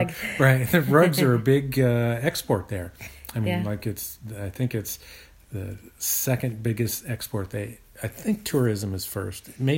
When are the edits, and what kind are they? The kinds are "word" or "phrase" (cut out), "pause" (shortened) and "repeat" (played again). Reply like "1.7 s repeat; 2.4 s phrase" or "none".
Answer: none